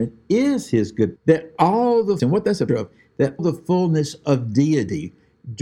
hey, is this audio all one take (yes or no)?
no